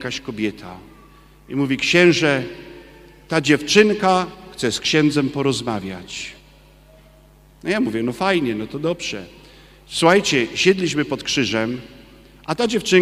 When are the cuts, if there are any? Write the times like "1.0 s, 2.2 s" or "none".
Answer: none

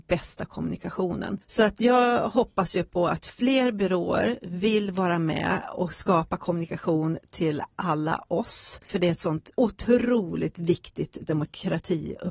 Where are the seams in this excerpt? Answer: 8.8 s, 9.5 s

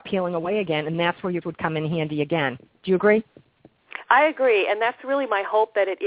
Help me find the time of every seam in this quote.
1.4 s

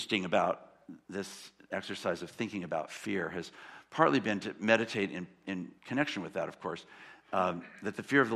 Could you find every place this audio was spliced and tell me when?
1.0 s, 5.8 s

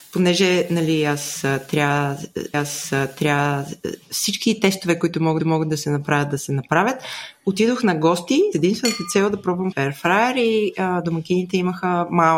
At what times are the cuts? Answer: 2.5 s, 5.4 s, 8.5 s, 9.7 s

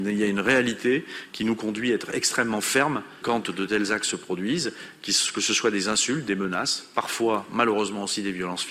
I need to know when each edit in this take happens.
3.2 s

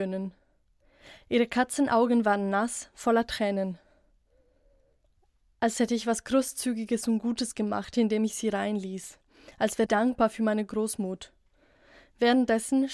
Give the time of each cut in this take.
9.9 s

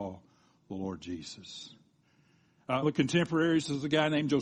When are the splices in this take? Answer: 2.8 s

